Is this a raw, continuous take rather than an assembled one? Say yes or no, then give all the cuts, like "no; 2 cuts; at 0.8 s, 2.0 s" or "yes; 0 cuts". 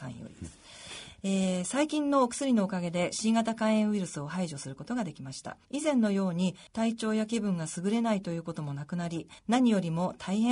no; 3 cuts; at 5.6 s, 6.7 s, 9.4 s